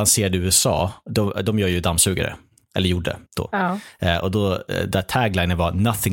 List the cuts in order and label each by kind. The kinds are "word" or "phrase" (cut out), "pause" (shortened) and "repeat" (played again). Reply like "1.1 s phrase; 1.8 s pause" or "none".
3.3 s pause